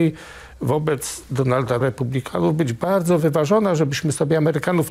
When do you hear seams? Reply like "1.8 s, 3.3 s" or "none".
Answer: 1.8 s